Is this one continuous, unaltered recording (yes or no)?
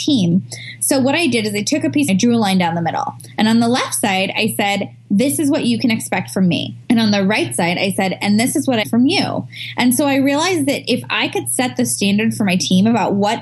no